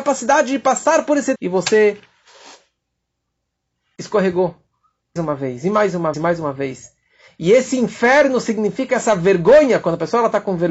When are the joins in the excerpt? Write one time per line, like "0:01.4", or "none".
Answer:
0:01.4
0:05.2
0:06.1